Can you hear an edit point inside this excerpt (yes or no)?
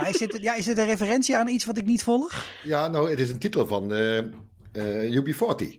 no